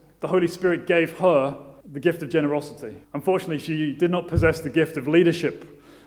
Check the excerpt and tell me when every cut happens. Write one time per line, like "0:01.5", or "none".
0:01.8
0:03.0